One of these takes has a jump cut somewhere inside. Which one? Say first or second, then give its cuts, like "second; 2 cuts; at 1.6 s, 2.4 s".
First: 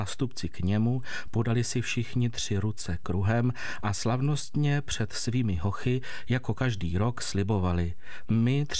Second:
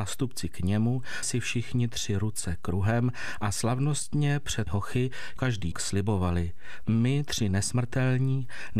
second; 4 cuts; at 1.2 s, 4.7 s, 5.4 s, 5.7 s